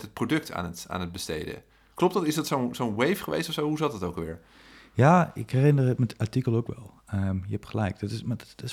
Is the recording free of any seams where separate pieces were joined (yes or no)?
yes